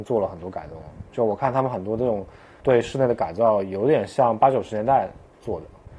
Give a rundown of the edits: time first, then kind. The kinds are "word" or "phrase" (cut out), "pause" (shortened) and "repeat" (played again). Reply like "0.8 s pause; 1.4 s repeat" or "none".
2.6 s word